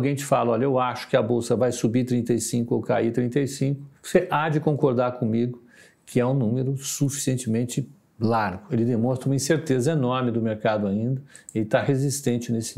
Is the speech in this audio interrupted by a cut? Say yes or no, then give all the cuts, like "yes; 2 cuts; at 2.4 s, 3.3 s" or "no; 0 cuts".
yes; 1 cut; at 4.0 s